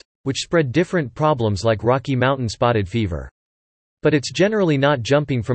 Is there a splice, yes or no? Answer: no